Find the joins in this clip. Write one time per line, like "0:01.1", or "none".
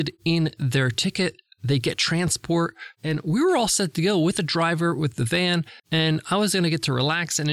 0:05.8

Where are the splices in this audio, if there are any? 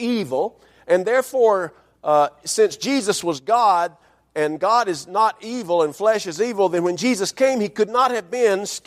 none

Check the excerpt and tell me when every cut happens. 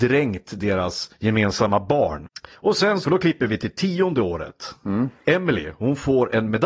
0:03.0

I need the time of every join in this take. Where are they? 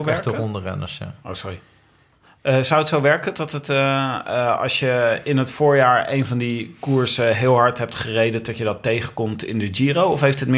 none

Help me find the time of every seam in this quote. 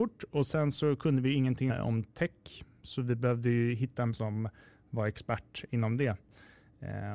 0:01.7
0:04.1

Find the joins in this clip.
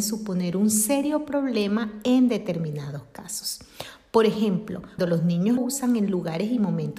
0:05.0
0:05.6

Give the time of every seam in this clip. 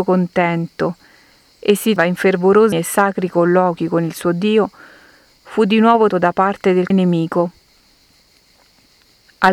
0:02.0
0:02.7
0:06.1
0:06.9

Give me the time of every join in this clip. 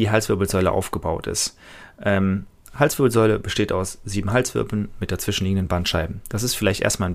none

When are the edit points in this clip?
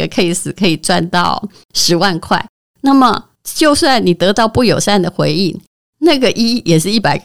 none

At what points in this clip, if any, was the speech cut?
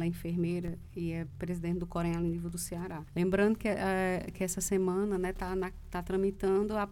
0:03.1

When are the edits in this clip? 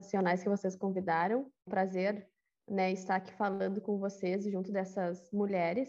0:01.7

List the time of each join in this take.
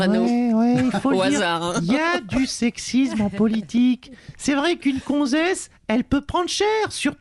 none

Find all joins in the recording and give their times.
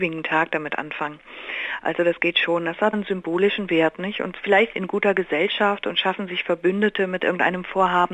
0:02.9
0:04.7

